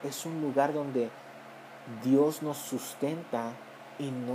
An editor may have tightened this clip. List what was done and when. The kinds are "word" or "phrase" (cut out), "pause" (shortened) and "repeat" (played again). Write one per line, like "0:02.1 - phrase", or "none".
none